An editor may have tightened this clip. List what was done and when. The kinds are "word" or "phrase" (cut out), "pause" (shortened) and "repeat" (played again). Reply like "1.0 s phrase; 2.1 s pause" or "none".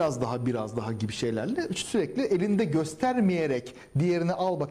none